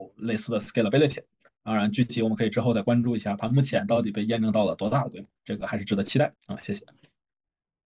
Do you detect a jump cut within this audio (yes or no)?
yes